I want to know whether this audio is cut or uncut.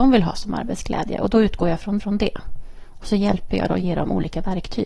cut